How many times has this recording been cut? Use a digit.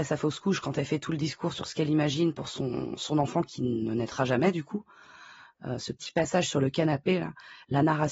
0